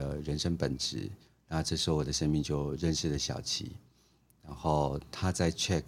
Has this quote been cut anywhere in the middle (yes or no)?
no